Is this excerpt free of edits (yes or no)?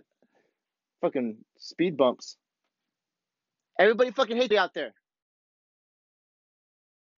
no